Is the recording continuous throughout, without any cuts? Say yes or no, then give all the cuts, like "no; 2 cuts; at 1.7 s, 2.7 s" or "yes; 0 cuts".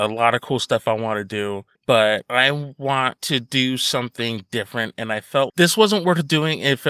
no; 2 cuts; at 1.7 s, 5.5 s